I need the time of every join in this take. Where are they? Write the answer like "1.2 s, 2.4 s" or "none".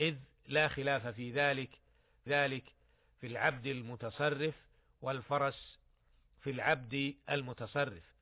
2.3 s